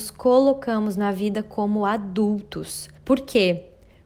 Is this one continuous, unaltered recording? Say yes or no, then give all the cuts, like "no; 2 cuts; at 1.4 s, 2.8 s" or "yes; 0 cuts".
no; 1 cut; at 3.0 s